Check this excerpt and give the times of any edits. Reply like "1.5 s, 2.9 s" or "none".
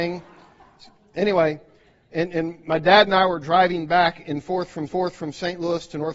4.9 s